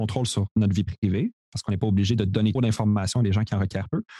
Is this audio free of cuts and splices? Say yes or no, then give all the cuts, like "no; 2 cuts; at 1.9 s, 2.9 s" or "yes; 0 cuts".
no; 1 cut; at 2.6 s